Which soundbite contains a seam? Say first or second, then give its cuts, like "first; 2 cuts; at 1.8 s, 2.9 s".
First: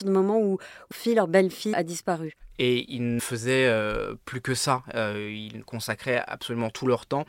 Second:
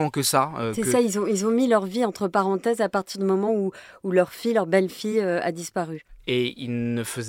first; 3 cuts; at 0.9 s, 1.7 s, 3.2 s